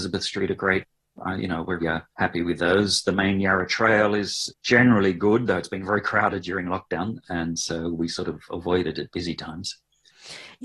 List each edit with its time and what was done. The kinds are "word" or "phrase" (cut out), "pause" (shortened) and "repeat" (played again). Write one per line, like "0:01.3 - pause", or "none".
0:01.8 - word
0:02.1 - pause

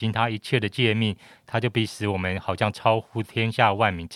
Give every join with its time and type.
none

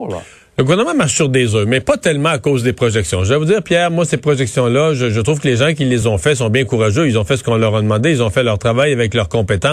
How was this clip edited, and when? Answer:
none

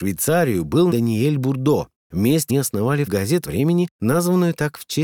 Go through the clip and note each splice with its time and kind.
0:00.9 - word
0:02.5 - word
0:03.1 - word
0:03.4 - word

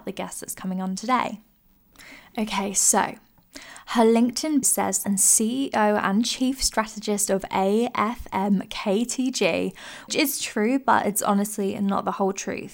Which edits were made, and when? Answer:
0:04.6 - word
0:05.0 - word
0:10.1 - word

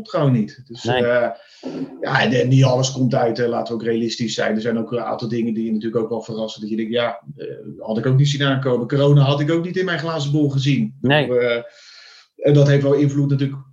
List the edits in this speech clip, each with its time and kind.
none

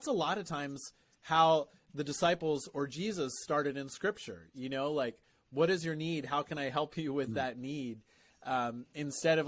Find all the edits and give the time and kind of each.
none

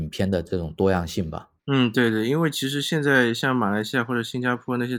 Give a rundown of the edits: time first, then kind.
0:01.6 - pause

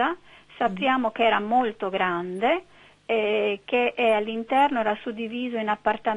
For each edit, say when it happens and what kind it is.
none

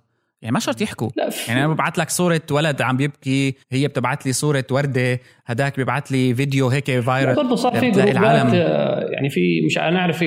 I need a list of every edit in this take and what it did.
0:03.6 - pause
0:07.3 - word

